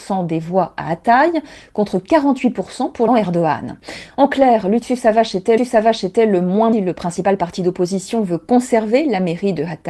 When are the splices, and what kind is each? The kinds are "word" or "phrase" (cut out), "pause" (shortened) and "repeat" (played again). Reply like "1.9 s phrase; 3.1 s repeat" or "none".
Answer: 3.1 s phrase; 5.6 s repeat; 6.7 s phrase